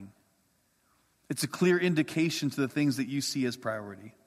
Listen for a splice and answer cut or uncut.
uncut